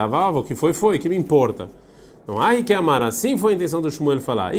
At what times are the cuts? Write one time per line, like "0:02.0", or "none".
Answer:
none